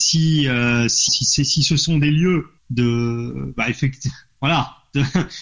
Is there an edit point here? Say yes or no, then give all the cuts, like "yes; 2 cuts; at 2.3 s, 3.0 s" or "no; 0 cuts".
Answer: yes; 2 cuts; at 1.1 s, 2.6 s